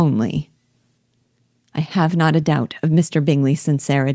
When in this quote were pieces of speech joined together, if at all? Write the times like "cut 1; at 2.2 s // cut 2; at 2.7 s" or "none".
none